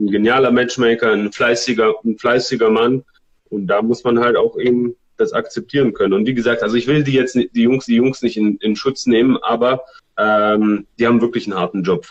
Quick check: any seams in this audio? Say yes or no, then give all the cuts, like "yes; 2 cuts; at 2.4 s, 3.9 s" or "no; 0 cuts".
yes; 2 cuts; at 7.9 s, 10.0 s